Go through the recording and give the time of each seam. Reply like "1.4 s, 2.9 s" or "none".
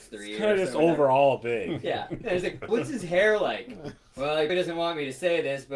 2.7 s, 4.5 s